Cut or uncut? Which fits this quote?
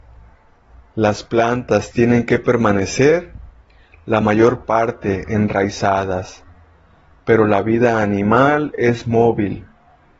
uncut